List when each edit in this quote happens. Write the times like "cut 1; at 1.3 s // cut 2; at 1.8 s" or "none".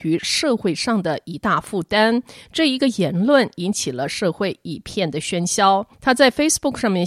cut 1; at 5.9 s